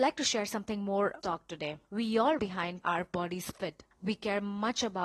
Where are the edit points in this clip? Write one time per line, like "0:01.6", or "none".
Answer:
0:01.2
0:01.8
0:02.4
0:02.8
0:03.9

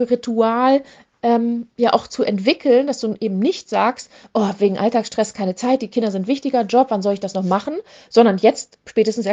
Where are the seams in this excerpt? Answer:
none

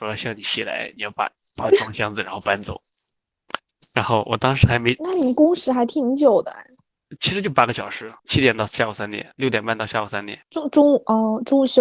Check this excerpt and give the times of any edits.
0:08.2
0:10.4

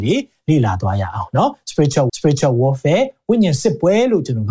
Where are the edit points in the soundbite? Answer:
0:02.1

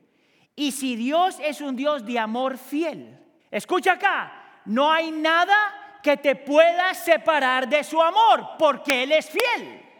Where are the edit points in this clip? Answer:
0:03.4

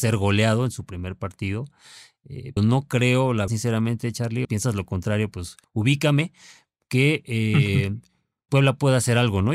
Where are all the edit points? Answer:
0:02.6
0:03.5
0:04.4
0:05.6
0:08.5

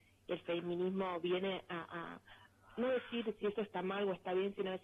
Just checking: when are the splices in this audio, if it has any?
none

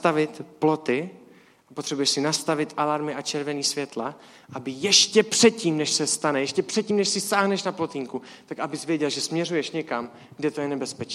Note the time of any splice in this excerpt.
none

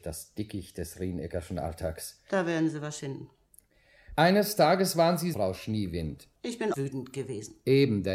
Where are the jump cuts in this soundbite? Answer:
0:03.0
0:05.3
0:06.4
0:06.7

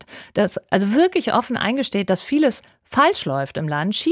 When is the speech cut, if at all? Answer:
none

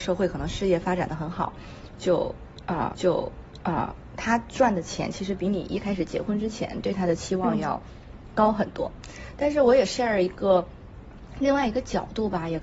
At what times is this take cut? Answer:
0:02.9

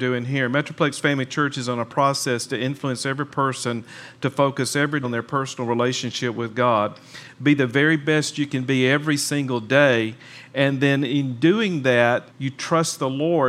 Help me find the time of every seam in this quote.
0:05.0
0:12.3

